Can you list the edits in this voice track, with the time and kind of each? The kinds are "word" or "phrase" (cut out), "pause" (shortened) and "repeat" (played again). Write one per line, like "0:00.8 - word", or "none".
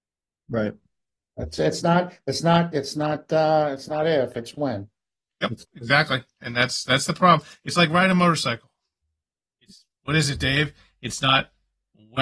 none